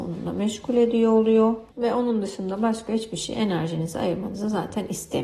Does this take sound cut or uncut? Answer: cut